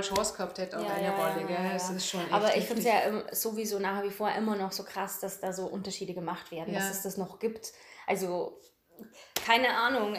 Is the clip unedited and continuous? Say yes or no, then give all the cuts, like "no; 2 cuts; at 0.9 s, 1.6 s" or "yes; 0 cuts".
yes; 0 cuts